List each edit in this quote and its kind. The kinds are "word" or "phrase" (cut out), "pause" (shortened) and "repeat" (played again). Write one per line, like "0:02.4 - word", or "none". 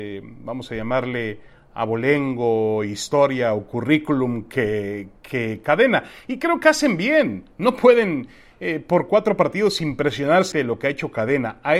0:10.5 - word